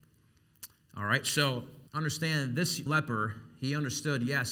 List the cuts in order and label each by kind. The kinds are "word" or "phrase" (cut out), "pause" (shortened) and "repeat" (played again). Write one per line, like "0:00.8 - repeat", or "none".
0:01.9 - pause
0:02.9 - word